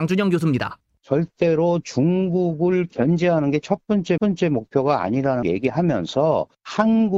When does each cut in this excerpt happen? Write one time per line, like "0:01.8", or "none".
0:04.2
0:05.4